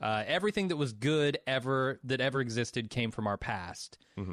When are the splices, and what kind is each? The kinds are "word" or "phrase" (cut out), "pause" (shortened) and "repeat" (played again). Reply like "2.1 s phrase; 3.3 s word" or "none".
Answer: none